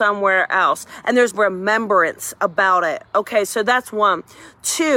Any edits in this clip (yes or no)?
yes